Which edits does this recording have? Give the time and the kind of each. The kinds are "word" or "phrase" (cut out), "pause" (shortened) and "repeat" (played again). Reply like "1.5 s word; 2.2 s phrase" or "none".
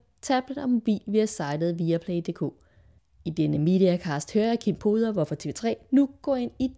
none